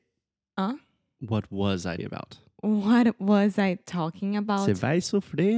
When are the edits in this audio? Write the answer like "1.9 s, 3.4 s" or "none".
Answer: 2.0 s